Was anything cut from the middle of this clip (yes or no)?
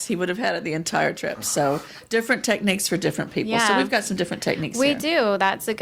no